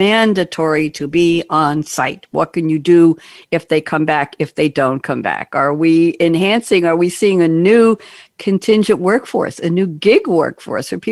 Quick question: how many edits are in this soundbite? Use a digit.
0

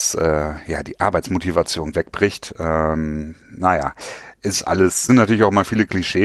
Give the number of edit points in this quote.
3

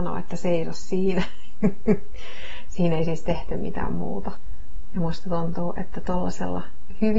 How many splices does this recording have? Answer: 0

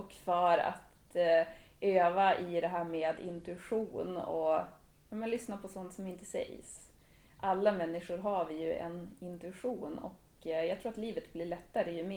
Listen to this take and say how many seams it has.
0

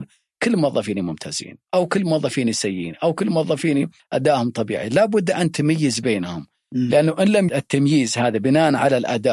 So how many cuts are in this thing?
1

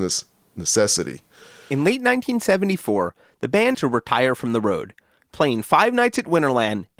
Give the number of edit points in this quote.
1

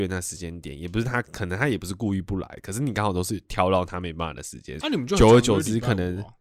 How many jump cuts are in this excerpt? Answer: 1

